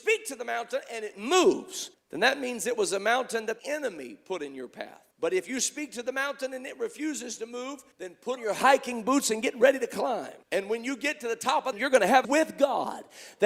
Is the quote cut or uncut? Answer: cut